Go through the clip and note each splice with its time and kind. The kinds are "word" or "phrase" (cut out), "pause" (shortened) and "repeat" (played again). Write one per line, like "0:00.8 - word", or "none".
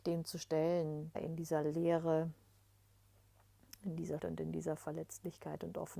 0:01.1 - word
0:04.2 - word

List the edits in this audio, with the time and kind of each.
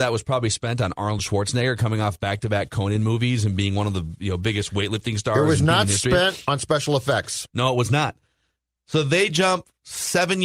none

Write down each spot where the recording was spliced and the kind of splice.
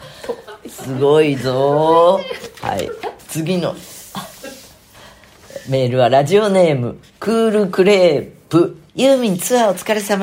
0:08.9 - pause

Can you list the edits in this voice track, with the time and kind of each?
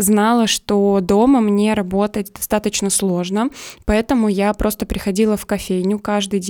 none

